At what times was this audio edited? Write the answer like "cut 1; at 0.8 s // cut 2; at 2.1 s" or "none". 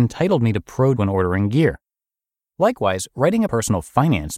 cut 1; at 1.0 s // cut 2; at 3.5 s

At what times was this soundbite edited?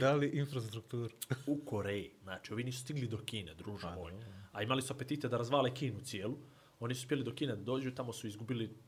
none

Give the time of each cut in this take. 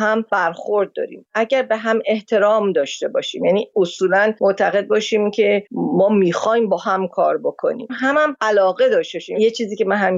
none

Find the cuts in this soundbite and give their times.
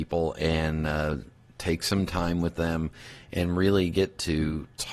none

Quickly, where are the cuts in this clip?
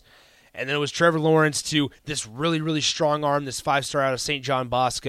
cut 1; at 2.0 s

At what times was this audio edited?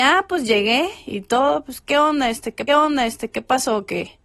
cut 1; at 2.7 s

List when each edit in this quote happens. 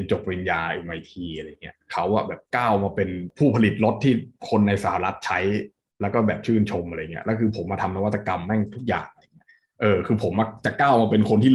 none

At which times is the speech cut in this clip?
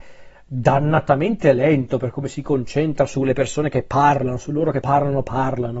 cut 1; at 4.8 s

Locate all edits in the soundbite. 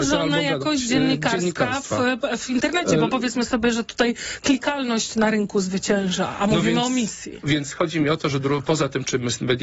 none

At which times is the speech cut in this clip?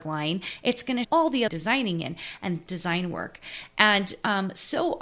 cut 1; at 1.0 s // cut 2; at 1.5 s // cut 3; at 2.7 s

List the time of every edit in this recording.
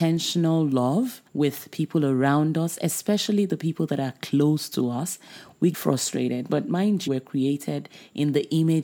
cut 1; at 1.3 s // cut 2; at 5.7 s // cut 3; at 7.1 s

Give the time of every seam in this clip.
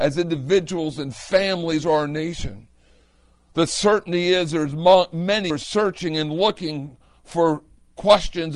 cut 1; at 5.5 s

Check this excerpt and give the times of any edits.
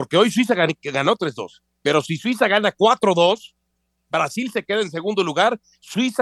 none

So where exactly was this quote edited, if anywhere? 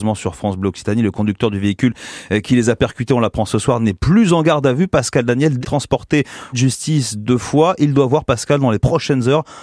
cut 1; at 5.6 s // cut 2; at 6.5 s

